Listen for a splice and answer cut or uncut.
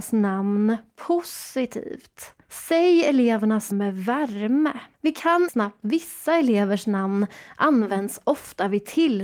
cut